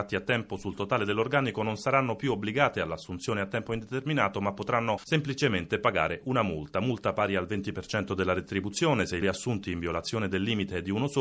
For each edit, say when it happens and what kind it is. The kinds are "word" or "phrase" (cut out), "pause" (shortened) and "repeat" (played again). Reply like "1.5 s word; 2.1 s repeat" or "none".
9.2 s phrase